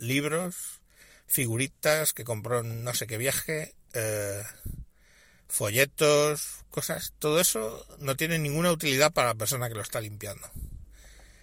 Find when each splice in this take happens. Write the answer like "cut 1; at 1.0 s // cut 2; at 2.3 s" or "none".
none

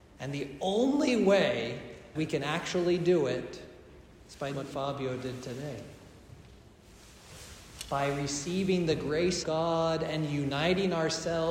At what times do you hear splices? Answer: cut 1; at 2.2 s // cut 2; at 4.5 s // cut 3; at 9.4 s

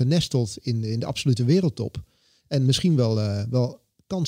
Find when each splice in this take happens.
none

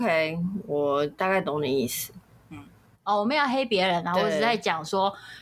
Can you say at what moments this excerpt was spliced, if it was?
none

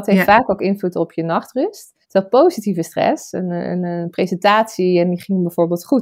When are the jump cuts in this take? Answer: cut 1; at 2.0 s

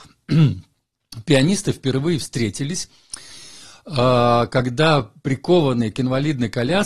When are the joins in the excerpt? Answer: none

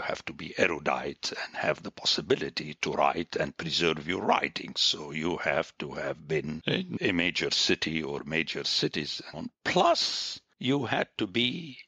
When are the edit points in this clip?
cut 1; at 9.3 s

